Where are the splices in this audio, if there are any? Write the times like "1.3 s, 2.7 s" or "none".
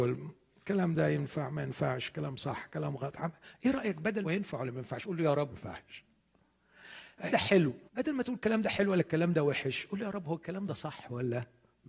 4.2 s, 5.5 s, 7.3 s, 7.9 s